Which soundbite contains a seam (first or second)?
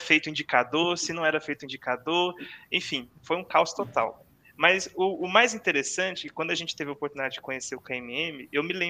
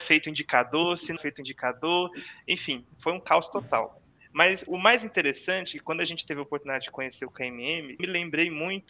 second